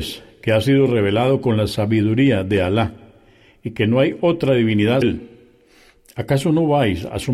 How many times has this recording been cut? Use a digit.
1